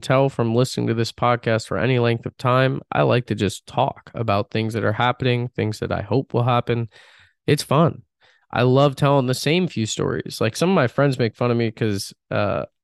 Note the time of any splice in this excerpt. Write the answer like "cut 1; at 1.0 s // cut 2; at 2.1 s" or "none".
none